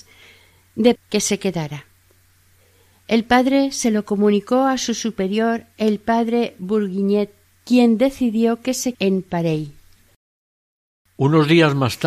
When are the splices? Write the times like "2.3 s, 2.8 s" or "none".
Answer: 1.0 s, 8.9 s